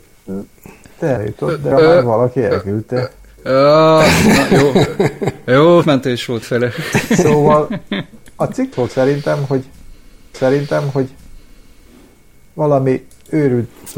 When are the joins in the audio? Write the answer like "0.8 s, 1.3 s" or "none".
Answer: 1.2 s, 1.7 s, 5.8 s, 6.4 s, 8.7 s, 10.3 s